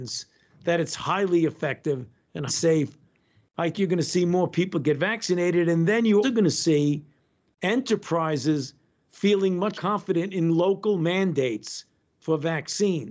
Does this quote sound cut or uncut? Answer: cut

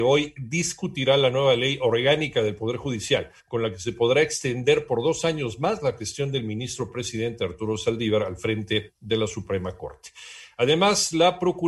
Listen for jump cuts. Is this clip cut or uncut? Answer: cut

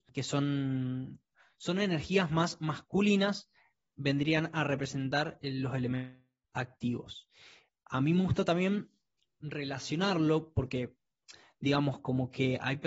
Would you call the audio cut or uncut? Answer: uncut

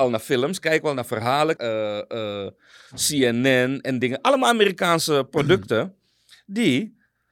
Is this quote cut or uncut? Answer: cut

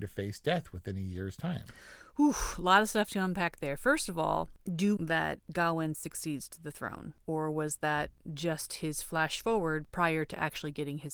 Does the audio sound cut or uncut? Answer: cut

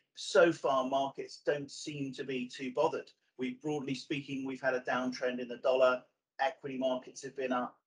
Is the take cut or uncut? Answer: uncut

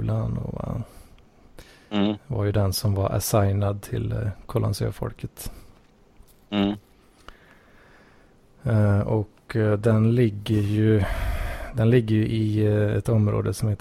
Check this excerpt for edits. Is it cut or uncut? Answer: uncut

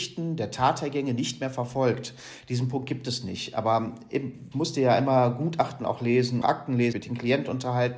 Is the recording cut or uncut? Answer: cut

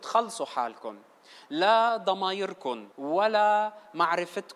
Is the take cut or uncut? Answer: cut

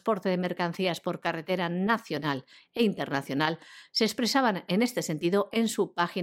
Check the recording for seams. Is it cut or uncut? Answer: uncut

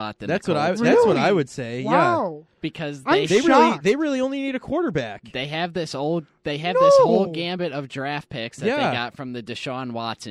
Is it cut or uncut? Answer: uncut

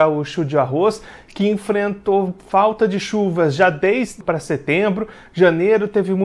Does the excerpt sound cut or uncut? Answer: cut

